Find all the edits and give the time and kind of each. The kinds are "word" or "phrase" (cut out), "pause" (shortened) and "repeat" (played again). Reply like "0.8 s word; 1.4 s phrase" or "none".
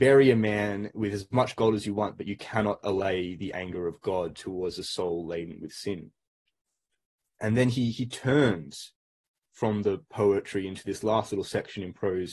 none